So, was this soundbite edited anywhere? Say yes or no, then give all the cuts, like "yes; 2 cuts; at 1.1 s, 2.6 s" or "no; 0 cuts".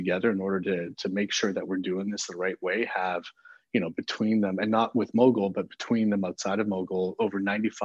no; 0 cuts